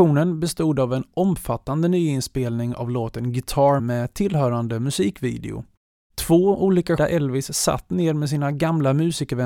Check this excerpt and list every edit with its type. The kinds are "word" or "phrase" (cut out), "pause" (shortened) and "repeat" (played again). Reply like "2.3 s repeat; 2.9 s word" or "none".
3.8 s word; 7.0 s word